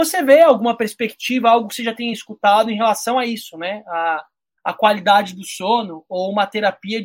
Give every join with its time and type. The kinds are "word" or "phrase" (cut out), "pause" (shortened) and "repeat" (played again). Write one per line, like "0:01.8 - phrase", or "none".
none

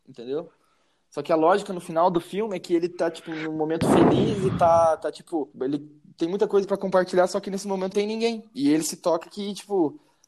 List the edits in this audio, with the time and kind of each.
0:05.5 - pause
0:07.9 - phrase

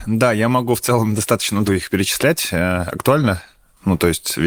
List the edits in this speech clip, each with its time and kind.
0:01.7 - word

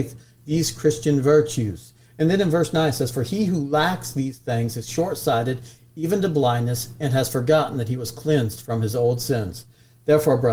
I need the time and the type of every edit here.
none

